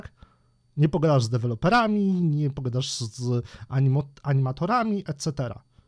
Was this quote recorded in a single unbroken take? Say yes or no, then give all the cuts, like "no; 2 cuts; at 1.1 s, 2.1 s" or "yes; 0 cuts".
yes; 0 cuts